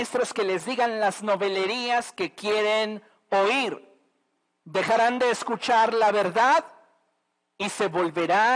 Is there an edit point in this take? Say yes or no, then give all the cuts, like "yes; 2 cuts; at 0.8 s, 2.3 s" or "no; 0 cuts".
no; 0 cuts